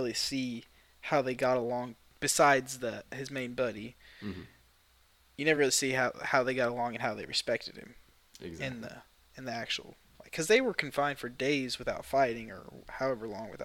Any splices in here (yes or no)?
no